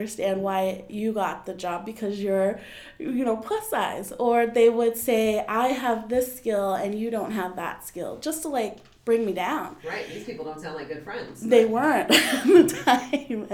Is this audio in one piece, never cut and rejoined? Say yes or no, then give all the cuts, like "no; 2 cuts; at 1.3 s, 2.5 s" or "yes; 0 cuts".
yes; 0 cuts